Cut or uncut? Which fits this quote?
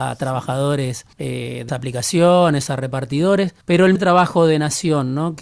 cut